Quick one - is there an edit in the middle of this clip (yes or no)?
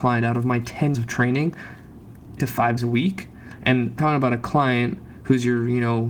yes